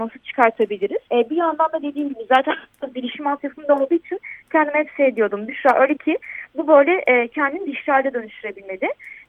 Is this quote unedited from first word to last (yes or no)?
no